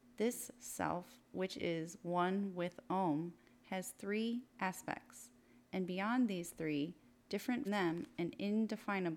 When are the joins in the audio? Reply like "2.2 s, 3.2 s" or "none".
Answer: 7.7 s